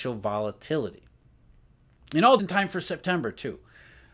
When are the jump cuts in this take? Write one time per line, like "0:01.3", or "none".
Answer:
0:02.4